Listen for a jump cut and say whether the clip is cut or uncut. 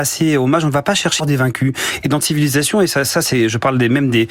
cut